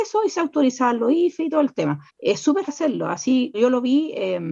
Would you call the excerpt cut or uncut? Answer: cut